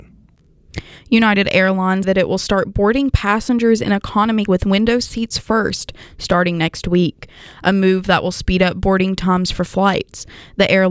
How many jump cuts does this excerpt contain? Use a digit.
2